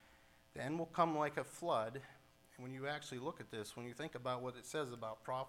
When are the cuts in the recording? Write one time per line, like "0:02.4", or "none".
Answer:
none

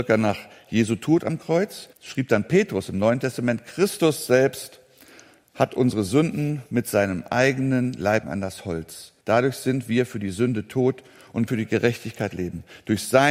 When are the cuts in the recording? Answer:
0:01.9
0:08.2
0:09.2
0:11.5

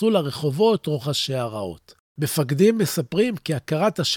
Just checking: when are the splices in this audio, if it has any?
0:02.1

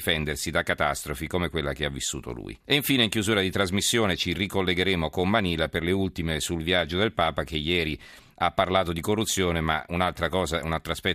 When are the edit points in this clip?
0:02.6

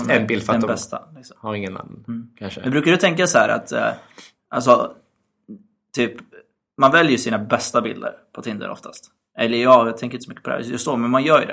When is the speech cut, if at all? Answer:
none

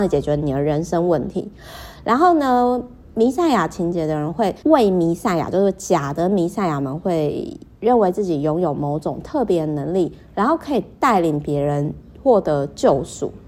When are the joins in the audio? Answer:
0:04.6

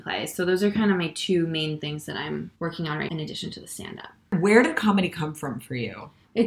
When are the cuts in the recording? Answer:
0:02.6
0:03.1

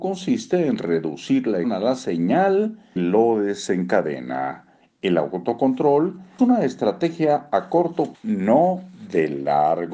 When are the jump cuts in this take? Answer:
0:01.6
0:03.0
0:04.8
0:06.4
0:08.1

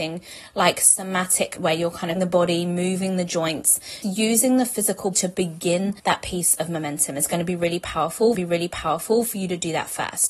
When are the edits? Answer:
0:01.6
0:02.2
0:04.0
0:05.1
0:06.0
0:08.3

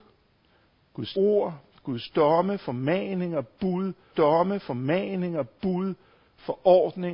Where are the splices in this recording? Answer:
0:01.1
0:04.1

